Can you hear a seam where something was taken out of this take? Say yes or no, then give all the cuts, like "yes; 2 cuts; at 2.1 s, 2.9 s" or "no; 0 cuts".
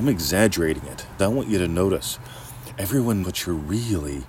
yes; 2 cuts; at 1.2 s, 3.2 s